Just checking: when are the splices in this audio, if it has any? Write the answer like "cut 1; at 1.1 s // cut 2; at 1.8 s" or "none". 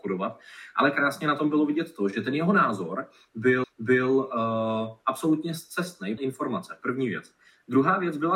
cut 1; at 3.6 s // cut 2; at 6.2 s